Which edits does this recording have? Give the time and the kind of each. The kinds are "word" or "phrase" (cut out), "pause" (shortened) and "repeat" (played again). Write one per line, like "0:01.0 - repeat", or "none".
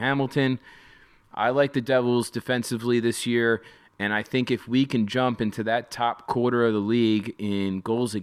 none